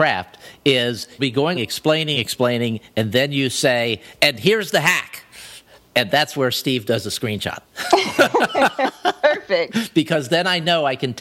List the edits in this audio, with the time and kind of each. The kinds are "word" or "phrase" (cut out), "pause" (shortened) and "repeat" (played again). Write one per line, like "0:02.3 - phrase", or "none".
0:01.2 - word
0:01.5 - word
0:02.1 - word
0:05.8 - pause
0:07.6 - pause